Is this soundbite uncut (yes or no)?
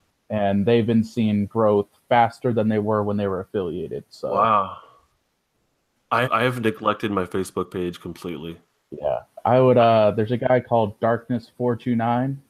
no